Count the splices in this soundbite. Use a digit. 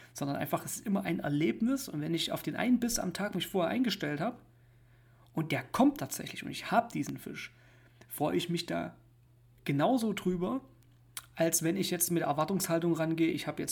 1